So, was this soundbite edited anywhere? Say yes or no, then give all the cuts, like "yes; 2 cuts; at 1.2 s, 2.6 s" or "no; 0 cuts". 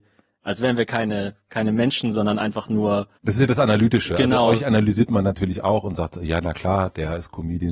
yes; 1 cut; at 3.2 s